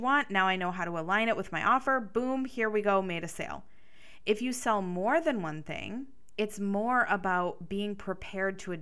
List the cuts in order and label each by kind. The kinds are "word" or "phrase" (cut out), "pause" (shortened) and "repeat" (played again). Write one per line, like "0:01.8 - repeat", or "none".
none